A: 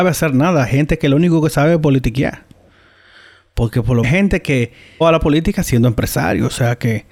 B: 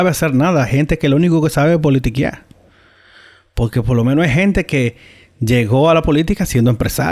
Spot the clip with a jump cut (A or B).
A